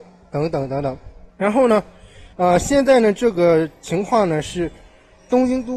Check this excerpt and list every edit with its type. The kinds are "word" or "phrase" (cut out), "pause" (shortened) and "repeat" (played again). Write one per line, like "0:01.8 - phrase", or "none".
0:01.3 - pause
0:02.3 - pause